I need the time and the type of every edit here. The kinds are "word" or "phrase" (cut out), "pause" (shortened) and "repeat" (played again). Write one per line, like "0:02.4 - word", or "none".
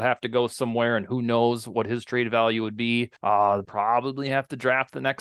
0:03.2 - pause
0:03.6 - phrase